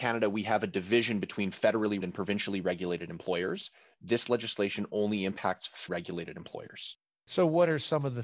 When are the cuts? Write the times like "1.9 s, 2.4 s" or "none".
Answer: 2.0 s, 5.9 s

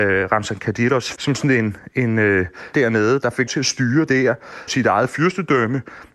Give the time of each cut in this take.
1.1 s, 2.7 s, 3.5 s, 4.1 s, 4.7 s

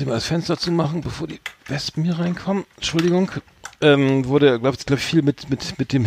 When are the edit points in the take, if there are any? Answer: 1.6 s, 2.7 s

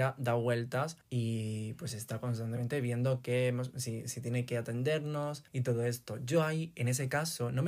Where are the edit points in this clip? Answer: 1.0 s, 5.5 s

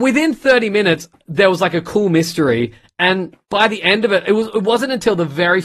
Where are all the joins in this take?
none

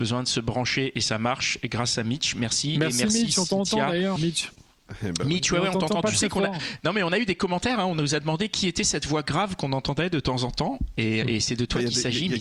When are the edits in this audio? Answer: 4.2 s, 11.2 s

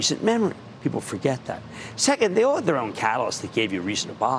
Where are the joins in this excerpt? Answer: none

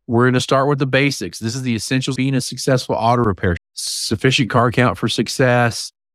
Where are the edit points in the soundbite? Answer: 2.2 s, 3.6 s

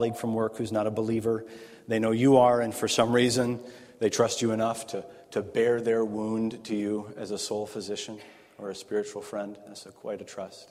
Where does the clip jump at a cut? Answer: none

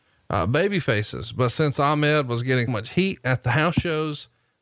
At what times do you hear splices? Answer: 2.7 s

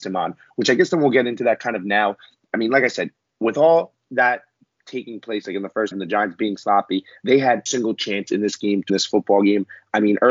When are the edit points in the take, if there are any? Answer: 5.9 s, 7.7 s, 8.9 s

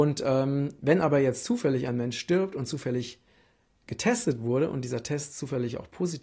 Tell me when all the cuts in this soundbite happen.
none

